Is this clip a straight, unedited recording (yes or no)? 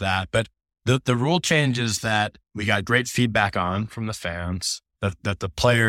yes